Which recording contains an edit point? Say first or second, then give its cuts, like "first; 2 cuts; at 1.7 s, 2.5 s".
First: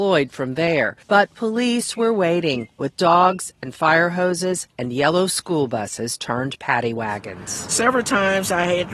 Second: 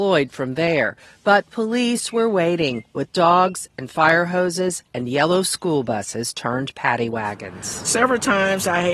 first; 1 cut; at 1.0 s